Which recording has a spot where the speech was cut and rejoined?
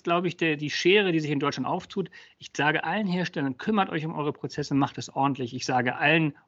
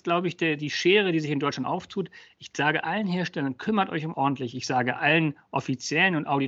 second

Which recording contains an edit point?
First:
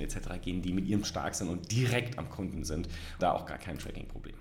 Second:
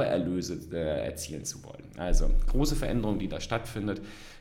first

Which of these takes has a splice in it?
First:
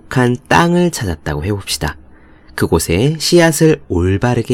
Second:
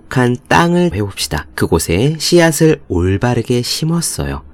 second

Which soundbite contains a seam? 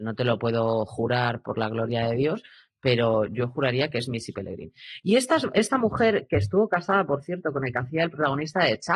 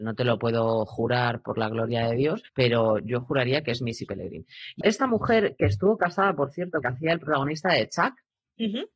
second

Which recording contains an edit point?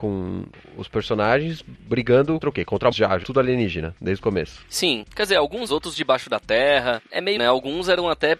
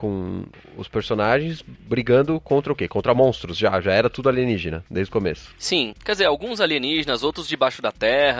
first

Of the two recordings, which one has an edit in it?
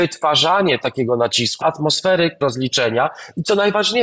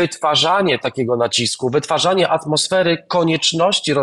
first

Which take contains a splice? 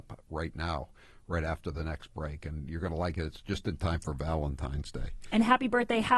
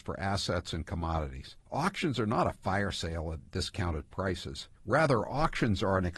second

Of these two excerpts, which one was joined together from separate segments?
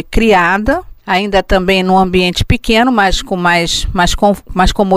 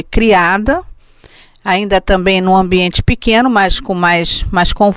first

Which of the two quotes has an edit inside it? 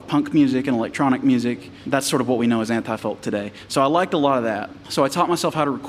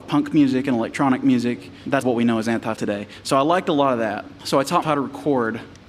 second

